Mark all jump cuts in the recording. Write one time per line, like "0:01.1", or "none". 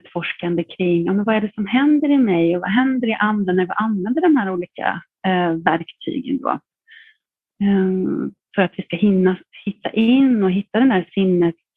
0:09.5